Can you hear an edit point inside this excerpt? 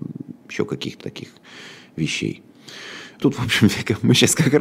yes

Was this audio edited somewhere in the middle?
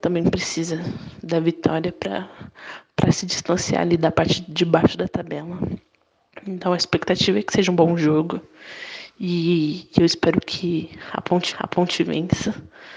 yes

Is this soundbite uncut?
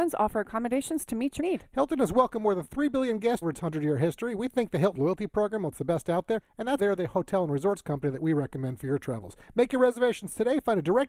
no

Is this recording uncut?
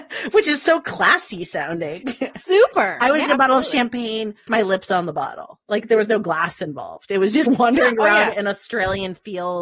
no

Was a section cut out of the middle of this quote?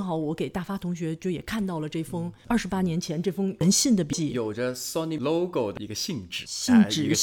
yes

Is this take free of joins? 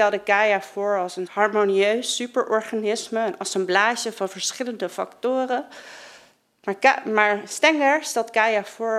no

